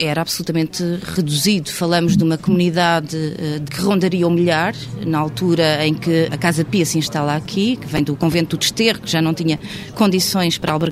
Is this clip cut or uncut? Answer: cut